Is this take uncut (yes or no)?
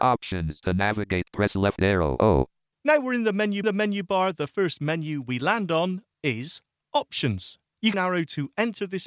no